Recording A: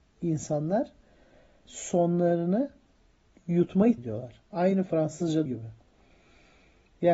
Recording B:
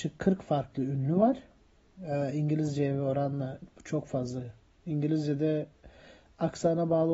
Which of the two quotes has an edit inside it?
A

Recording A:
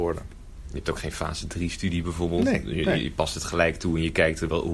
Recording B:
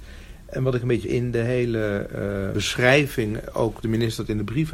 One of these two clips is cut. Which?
B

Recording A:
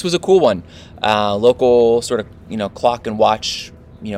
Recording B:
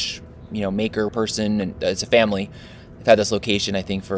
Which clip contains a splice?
B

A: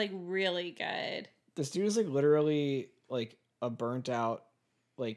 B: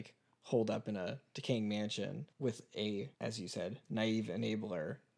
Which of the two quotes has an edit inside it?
B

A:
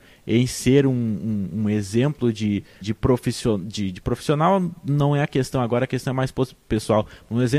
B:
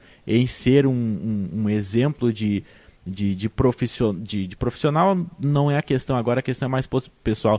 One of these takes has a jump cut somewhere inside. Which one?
A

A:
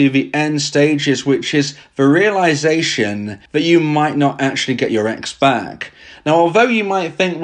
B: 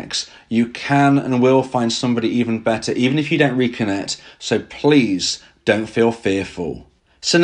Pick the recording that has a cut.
A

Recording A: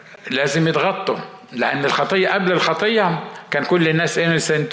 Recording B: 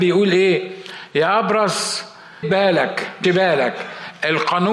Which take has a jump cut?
B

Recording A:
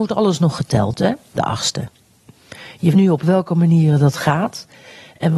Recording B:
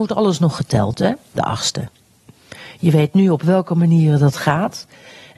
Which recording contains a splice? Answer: A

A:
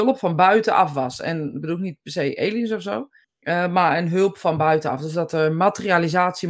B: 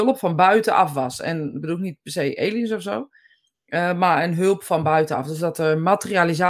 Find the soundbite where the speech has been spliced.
A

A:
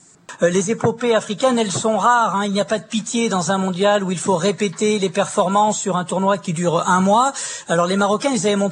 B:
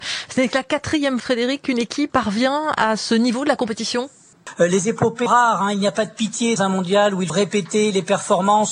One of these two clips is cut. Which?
B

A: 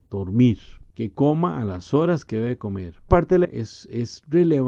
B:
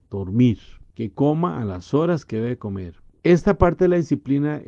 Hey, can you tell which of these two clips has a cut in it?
A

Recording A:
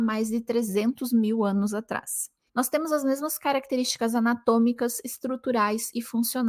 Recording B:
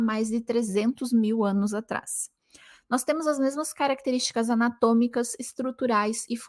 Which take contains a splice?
A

